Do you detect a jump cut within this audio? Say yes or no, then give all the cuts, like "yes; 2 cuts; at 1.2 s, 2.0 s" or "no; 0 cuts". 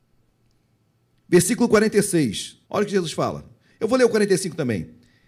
yes; 1 cut; at 2.6 s